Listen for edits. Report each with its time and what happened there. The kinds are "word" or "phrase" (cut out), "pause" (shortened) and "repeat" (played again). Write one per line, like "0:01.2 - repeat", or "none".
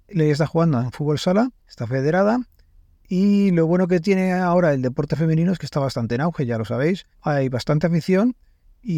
0:01.6 - pause
0:07.1 - pause